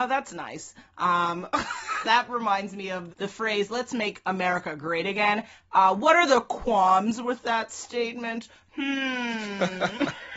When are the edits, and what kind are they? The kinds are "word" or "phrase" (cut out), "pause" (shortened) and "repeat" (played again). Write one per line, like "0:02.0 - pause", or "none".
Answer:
0:02.0 - word
0:03.1 - word